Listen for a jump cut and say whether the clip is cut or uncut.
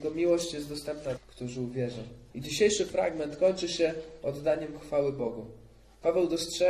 cut